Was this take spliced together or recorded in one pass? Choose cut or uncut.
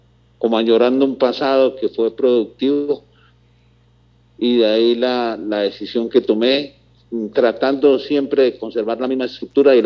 uncut